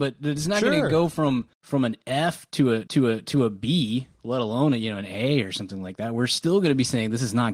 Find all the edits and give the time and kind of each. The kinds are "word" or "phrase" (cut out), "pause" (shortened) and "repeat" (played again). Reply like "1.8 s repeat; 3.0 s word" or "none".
1.5 s pause; 2.9 s repeat